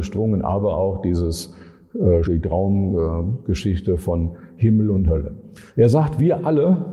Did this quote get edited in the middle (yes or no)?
yes